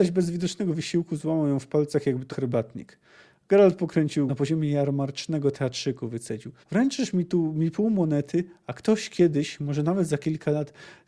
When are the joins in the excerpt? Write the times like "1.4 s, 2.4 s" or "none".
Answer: 2.3 s, 4.3 s, 6.6 s